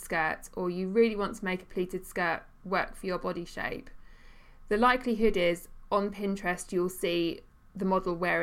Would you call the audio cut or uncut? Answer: uncut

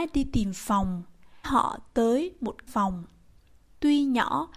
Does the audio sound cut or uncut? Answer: cut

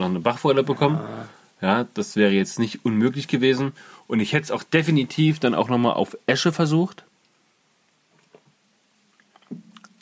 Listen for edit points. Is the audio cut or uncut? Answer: uncut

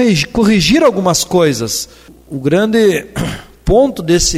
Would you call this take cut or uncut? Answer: uncut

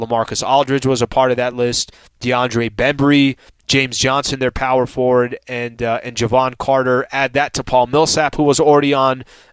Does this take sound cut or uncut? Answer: uncut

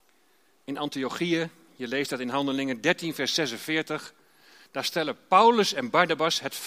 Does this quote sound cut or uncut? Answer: uncut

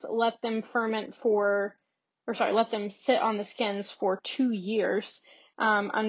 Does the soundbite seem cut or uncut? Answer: uncut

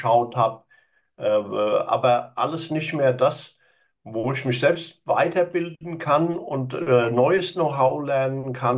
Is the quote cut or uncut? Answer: uncut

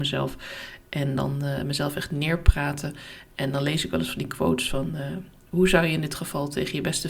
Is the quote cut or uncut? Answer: uncut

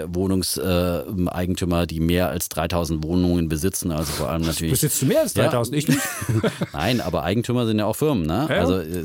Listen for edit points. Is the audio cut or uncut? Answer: uncut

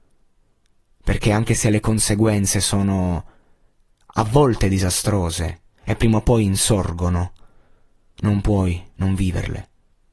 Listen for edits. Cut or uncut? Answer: uncut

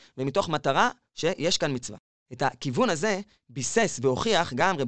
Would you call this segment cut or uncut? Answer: uncut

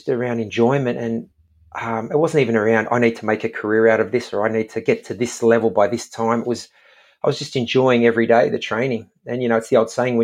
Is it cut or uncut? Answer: uncut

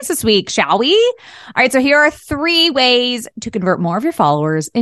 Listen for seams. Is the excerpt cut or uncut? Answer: uncut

